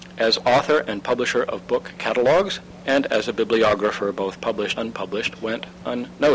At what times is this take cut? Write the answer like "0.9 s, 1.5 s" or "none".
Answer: 4.8 s